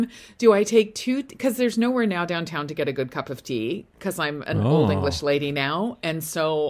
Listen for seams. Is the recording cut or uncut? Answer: uncut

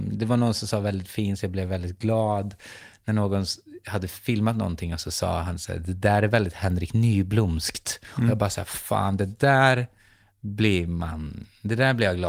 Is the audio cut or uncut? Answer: uncut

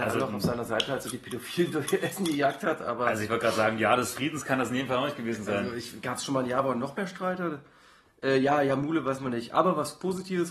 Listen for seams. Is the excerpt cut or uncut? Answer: uncut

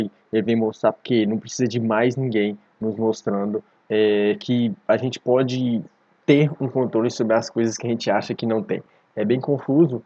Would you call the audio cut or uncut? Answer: uncut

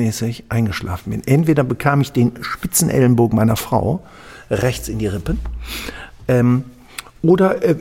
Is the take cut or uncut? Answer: uncut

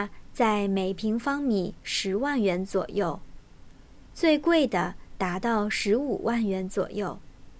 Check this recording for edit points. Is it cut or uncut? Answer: uncut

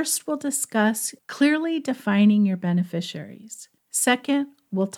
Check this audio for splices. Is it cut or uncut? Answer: cut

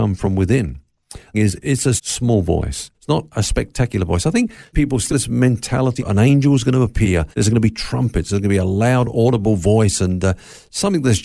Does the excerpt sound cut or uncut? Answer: cut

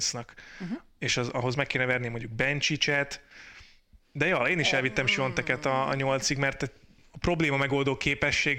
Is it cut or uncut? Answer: uncut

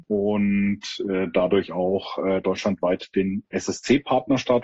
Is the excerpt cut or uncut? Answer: uncut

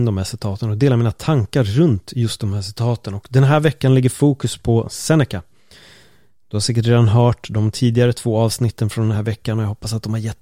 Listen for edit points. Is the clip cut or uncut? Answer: uncut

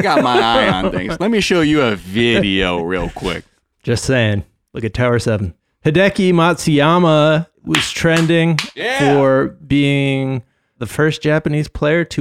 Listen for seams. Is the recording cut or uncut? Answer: uncut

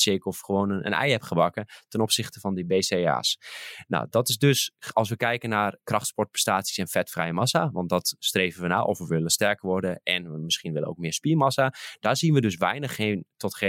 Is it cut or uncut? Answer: uncut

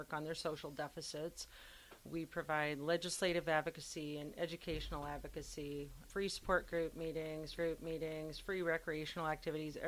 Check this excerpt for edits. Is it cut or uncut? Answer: cut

